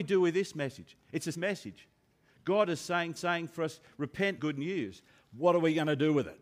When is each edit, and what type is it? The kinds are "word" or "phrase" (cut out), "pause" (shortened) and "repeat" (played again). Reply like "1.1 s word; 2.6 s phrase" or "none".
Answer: 1.3 s word; 3.2 s repeat; 4.4 s phrase

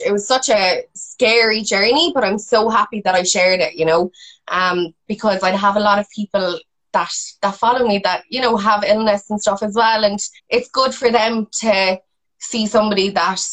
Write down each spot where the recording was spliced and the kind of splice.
10.4 s pause

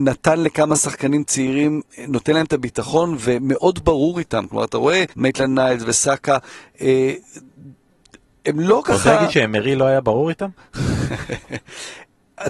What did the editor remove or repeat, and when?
5.1 s pause

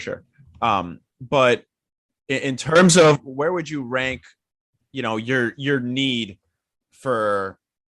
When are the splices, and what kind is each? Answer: none

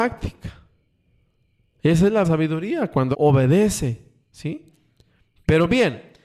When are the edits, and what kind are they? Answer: 2.2 s word; 3.1 s word

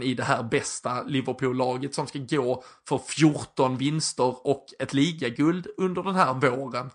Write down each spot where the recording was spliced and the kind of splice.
none

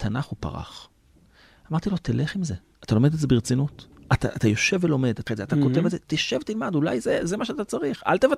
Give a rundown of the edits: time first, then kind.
5.3 s word

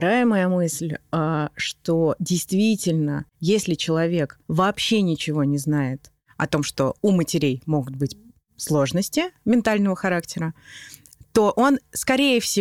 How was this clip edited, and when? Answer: 3.3 s pause; 4.4 s pause; 7.0 s pause

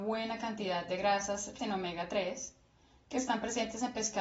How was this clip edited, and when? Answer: 1.6 s word

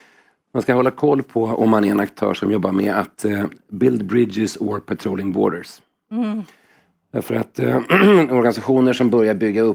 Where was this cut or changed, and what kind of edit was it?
none

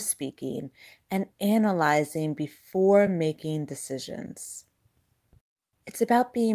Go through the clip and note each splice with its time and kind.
none

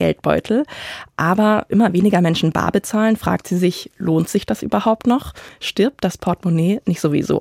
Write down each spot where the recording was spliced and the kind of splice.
1.7 s word

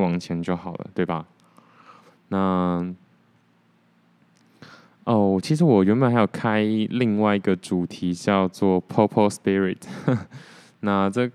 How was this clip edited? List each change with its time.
none

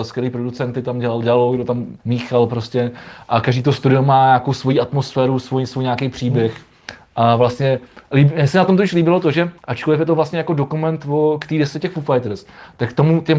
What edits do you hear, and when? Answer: 2.0 s pause; 9.6 s pause

